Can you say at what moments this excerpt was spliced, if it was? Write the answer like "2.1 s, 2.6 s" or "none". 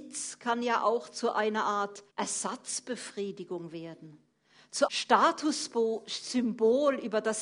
2.1 s, 4.9 s